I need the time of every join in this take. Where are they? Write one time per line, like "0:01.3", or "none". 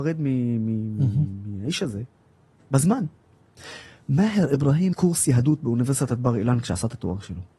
0:04.9

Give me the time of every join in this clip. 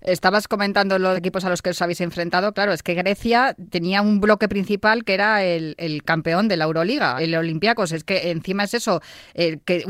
0:01.1
0:07.2

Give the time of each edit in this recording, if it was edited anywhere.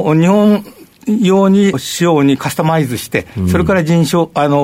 0:01.7

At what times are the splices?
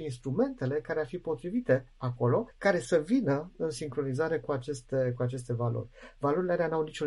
0:02.5

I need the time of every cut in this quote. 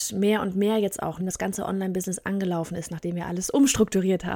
0:01.2

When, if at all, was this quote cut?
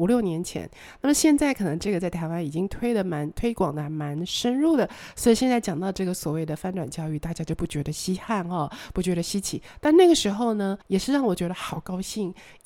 0:10.8

